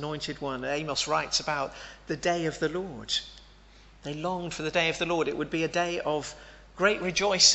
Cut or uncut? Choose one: uncut